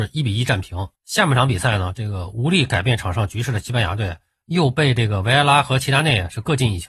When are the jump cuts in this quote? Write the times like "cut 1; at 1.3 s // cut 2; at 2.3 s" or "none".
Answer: cut 1; at 0.9 s